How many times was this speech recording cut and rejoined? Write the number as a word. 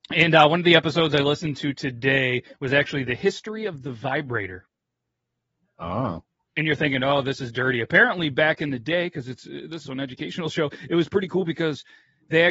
one